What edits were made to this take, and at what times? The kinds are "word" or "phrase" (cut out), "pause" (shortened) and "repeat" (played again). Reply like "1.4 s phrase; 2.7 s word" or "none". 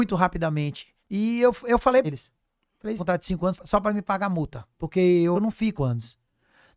1.0 s pause; 2.0 s word; 3.0 s phrase; 3.5 s word; 4.7 s pause; 5.3 s phrase; 5.8 s word